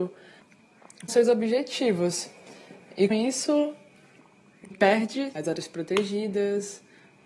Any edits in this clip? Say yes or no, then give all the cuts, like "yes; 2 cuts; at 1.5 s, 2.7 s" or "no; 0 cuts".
yes; 4 cuts; at 1.1 s, 3.1 s, 4.7 s, 5.3 s